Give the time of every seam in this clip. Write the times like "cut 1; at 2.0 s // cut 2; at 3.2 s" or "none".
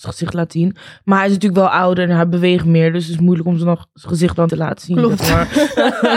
cut 1; at 4.5 s